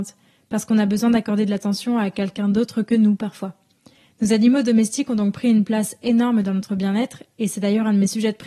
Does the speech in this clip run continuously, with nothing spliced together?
yes; 0 cuts

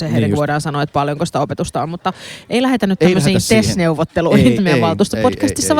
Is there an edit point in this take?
yes; 1 cut; at 4.6 s

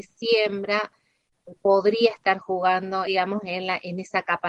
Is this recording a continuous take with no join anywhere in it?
no; 1 cut; at 3.1 s

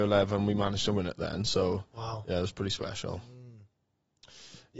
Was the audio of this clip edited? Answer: no; 0 cuts

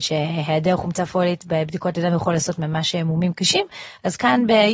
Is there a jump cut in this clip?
no; 0 cuts

